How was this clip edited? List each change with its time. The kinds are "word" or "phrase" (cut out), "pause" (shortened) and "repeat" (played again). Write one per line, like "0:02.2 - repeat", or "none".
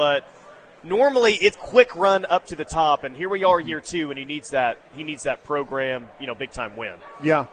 0:01.5 - word